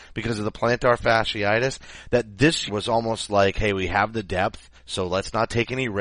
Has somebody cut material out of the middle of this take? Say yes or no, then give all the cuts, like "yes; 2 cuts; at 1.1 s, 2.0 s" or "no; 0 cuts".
yes; 2 cuts; at 2.7 s, 4.8 s